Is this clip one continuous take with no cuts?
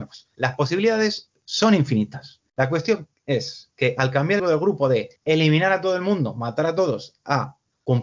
no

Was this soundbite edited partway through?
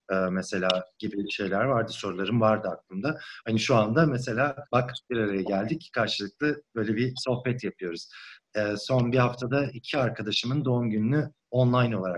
yes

